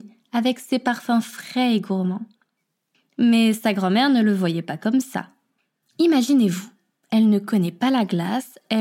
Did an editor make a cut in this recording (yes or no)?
no